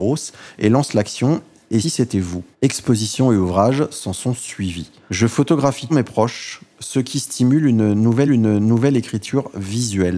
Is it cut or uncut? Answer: cut